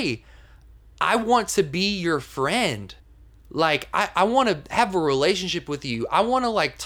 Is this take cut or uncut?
uncut